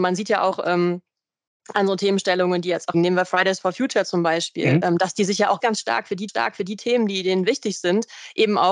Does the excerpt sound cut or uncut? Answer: cut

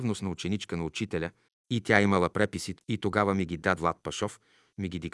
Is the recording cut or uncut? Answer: cut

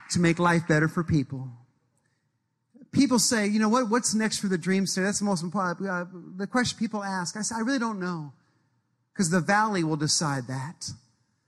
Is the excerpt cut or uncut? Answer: uncut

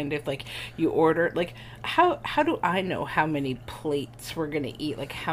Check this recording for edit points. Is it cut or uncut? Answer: uncut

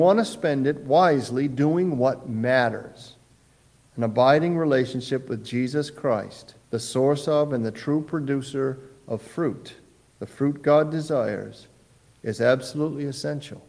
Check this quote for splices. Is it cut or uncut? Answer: cut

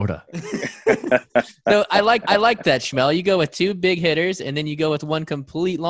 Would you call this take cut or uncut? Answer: cut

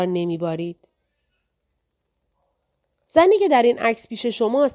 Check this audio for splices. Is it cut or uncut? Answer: uncut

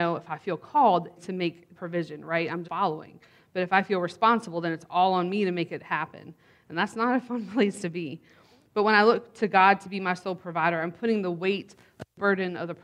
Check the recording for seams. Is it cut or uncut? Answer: cut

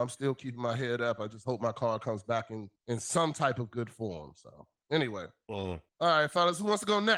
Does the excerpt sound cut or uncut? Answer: cut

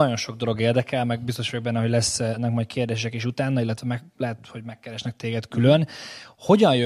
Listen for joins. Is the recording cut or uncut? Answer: uncut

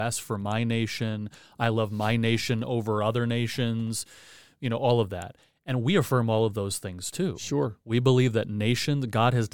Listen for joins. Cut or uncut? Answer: uncut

